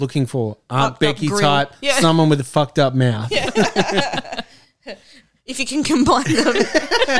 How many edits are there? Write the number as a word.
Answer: zero